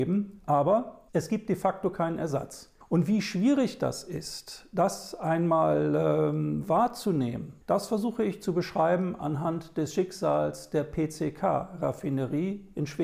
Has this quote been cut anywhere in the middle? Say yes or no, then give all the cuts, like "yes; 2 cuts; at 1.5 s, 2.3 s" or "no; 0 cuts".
yes; 3 cuts; at 1.1 s, 2.8 s, 7.6 s